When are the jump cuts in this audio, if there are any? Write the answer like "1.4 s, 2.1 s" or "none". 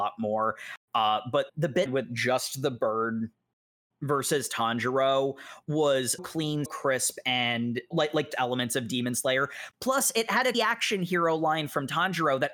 1.5 s, 1.9 s, 3.9 s, 6.2 s, 6.7 s, 7.9 s, 8.3 s, 10.5 s